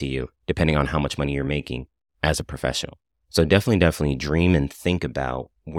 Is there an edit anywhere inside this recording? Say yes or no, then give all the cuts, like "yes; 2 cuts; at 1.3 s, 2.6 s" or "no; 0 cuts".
no; 0 cuts